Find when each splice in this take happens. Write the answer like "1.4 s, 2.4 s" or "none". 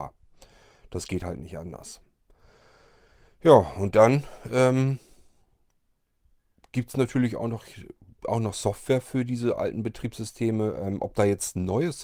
none